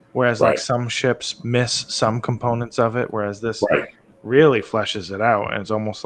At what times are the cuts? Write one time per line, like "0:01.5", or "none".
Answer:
none